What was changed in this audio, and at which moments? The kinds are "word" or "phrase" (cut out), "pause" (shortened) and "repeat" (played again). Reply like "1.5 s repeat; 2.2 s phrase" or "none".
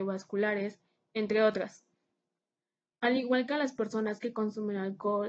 none